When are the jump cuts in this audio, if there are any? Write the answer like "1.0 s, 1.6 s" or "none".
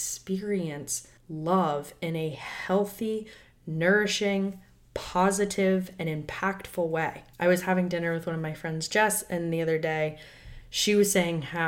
1.2 s, 7.3 s